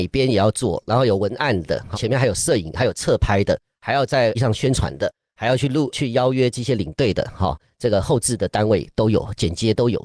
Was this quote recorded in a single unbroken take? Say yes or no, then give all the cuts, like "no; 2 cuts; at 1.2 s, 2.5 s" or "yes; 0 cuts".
no; 2 cuts; at 1.9 s, 4.3 s